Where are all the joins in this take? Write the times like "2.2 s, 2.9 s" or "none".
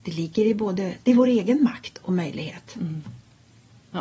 none